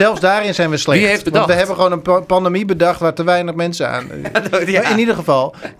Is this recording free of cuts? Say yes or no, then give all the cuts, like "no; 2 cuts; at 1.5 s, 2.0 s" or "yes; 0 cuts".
no; 1 cut; at 1.2 s